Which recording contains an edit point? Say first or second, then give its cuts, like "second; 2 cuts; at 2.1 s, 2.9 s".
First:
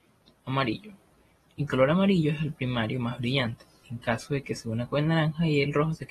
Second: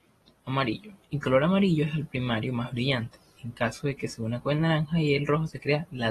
second; 1 cut; at 1.0 s